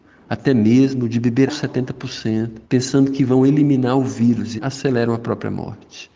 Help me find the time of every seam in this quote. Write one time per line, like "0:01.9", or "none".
0:01.5
0:02.6
0:04.6